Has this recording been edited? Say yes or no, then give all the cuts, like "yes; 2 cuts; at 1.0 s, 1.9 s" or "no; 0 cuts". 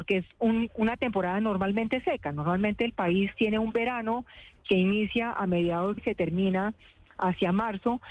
yes; 1 cut; at 6.0 s